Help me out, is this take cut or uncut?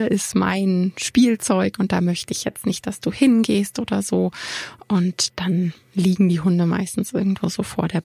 uncut